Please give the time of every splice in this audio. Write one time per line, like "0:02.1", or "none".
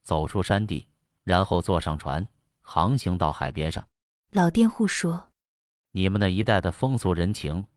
0:03.9